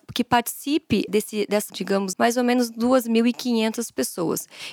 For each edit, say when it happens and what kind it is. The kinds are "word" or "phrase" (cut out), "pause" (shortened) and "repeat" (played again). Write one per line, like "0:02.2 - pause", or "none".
0:01.1 - word
0:01.7 - word
0:02.1 - word